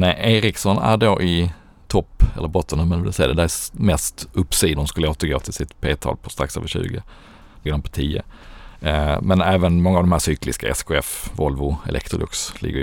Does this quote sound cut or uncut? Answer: cut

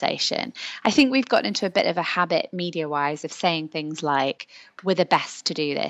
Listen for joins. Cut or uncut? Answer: uncut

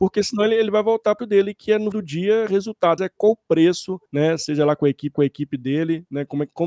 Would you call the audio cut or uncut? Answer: cut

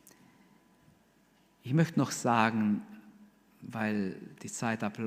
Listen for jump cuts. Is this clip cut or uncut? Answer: uncut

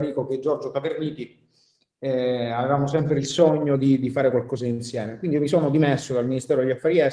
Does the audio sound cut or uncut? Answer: uncut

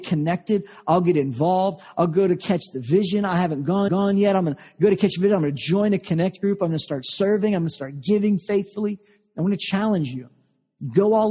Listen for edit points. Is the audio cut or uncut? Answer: cut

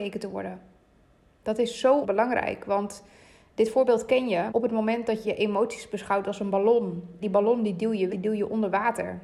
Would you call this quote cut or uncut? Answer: cut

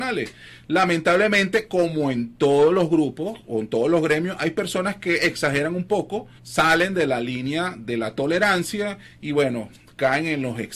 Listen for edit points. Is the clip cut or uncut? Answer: cut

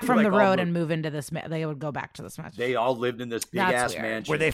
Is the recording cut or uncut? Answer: uncut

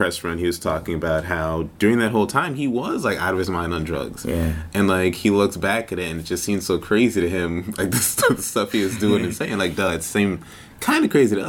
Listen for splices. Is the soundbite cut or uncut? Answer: uncut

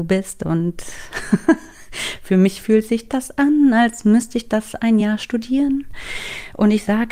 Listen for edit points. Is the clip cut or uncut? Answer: uncut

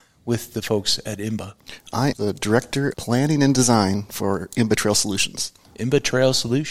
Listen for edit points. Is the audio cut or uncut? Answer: cut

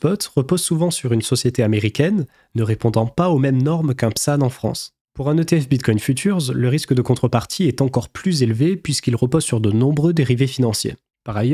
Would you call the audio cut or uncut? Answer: uncut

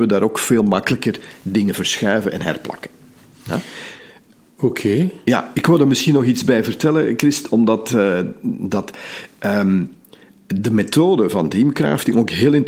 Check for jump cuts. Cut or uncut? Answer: uncut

